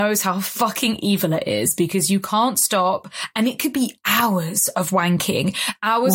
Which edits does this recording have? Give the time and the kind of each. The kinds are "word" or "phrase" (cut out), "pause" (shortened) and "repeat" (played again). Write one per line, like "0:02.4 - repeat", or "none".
none